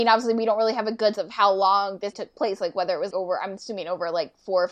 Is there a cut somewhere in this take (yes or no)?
yes